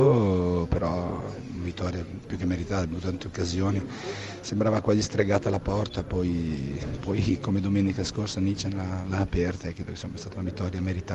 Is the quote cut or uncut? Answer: uncut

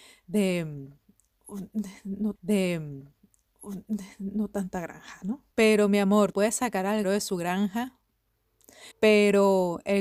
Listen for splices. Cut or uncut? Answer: cut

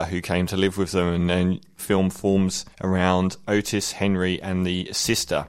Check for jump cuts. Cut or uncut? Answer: cut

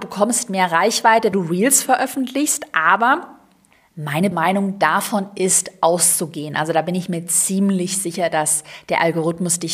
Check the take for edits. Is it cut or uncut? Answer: cut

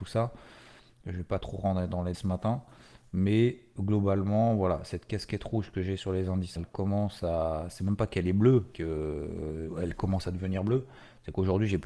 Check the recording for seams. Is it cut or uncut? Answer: cut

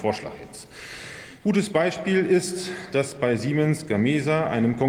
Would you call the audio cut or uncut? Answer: uncut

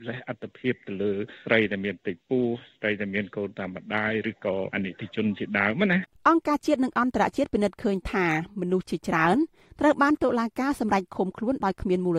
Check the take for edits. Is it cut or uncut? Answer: uncut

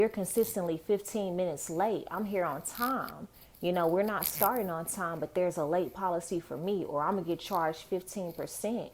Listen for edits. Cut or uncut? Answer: uncut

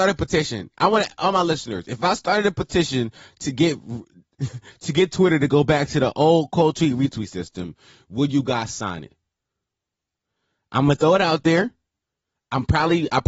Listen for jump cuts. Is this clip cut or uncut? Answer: uncut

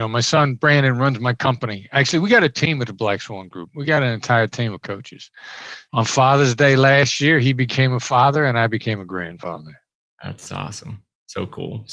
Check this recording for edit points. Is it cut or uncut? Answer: cut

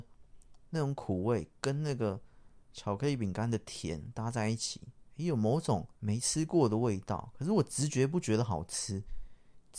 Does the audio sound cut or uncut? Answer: cut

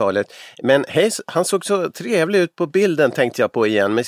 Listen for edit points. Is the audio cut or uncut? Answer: uncut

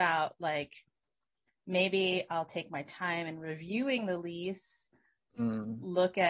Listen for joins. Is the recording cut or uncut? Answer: uncut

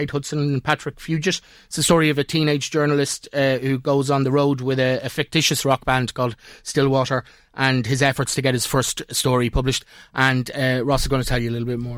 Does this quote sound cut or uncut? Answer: uncut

